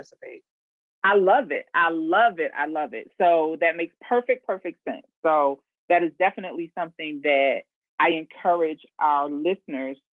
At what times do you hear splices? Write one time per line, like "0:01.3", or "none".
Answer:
none

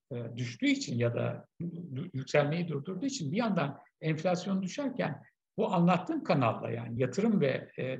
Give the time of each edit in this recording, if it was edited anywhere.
none

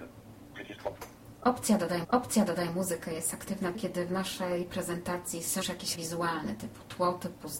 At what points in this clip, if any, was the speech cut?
0:02.0
0:03.7
0:05.6
0:05.9

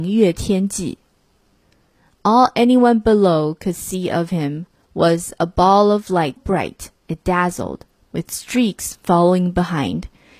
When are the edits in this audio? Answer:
0:06.4

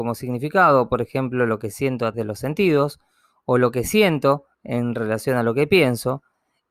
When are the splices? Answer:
0:02.1
0:04.5

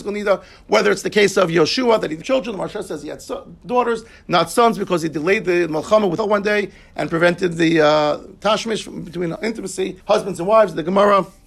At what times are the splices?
0:02.2
0:06.2
0:09.4
0:10.0

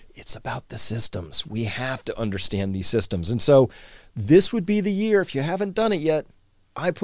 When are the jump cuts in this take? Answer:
none

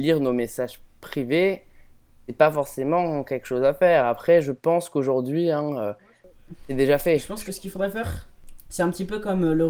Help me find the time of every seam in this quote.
none

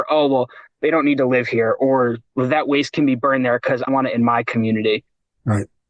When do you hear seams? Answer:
0:03.9

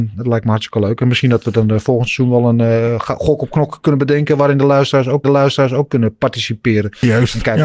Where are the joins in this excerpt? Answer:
0:05.2

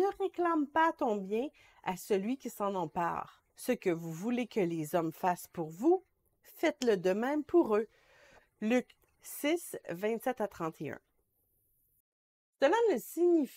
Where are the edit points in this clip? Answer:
0:03.5

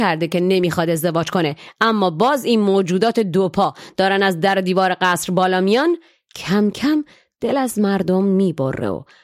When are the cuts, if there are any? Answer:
none

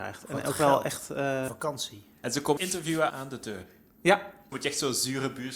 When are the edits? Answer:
0:01.5
0:02.6
0:03.1
0:04.5

